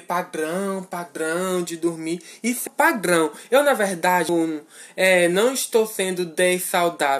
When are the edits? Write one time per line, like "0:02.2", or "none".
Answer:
0:02.7
0:04.3